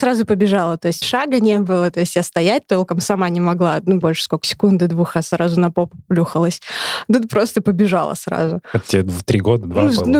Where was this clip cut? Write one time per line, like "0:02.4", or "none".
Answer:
0:01.0
0:04.0
0:04.4